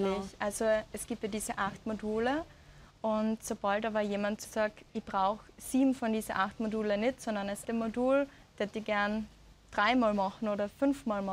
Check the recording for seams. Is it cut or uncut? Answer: cut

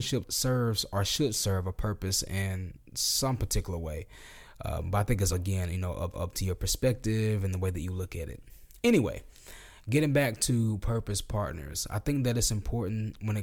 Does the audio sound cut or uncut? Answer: cut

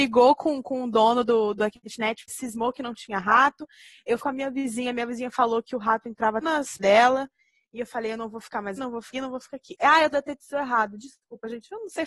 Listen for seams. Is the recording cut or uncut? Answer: cut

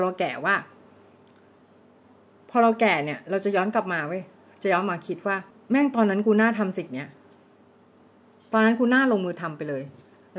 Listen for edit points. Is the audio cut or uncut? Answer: cut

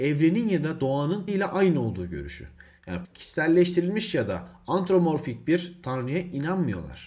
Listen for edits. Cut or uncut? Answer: cut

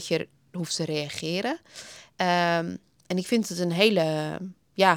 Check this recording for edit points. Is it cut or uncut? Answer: uncut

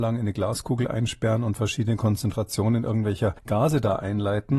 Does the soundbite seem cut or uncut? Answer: cut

